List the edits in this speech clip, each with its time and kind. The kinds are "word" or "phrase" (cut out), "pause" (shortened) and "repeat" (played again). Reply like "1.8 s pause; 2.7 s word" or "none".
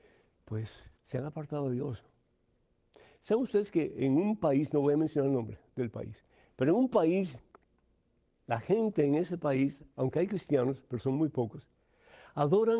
1.0 s pause